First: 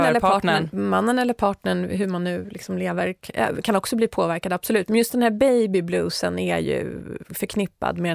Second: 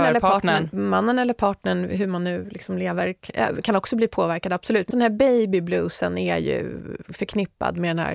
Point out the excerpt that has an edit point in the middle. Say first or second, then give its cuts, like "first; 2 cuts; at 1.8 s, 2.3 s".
second; 1 cut; at 4.9 s